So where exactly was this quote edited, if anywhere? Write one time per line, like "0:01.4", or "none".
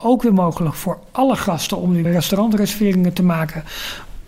0:02.0